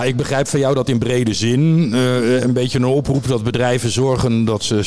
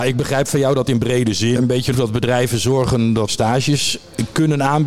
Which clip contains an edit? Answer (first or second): second